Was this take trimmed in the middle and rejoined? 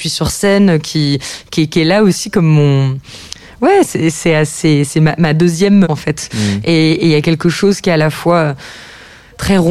yes; 1 cut; at 5.8 s

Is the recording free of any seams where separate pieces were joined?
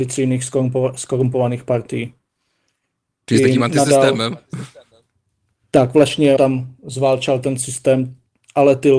no; 1 cut; at 6.4 s

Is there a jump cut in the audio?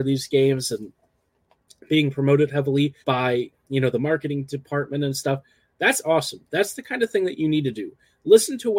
yes; 1 cut; at 3.0 s

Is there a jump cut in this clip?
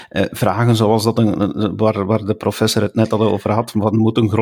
no; 0 cuts

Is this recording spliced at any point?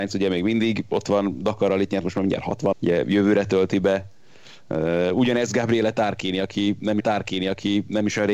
yes; 2 cuts; at 2.7 s, 7.0 s

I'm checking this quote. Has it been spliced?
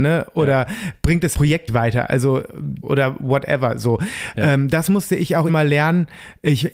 yes; 4 cuts; at 1.3 s, 1.7 s, 2.8 s, 5.5 s

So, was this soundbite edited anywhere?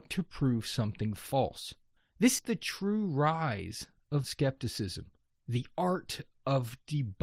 yes; 2 cuts; at 2.4 s, 4.2 s

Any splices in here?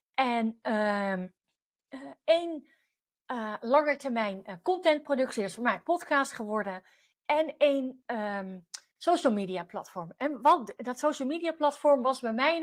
no; 0 cuts

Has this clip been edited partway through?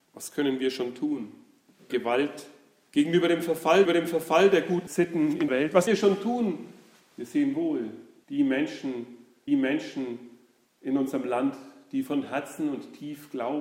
yes; 5 cuts; at 1.9 s, 3.8 s, 5.5 s, 5.9 s, 9.5 s

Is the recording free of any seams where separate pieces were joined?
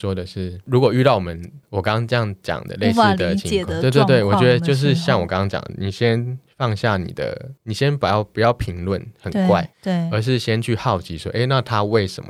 no; 2 cuts; at 1.6 s, 9.7 s

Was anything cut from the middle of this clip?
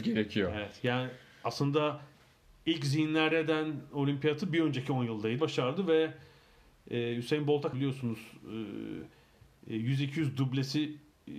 yes; 3 cuts; at 3.3 s, 5.4 s, 7.7 s

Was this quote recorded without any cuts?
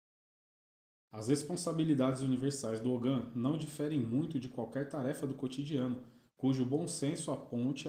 yes; 0 cuts

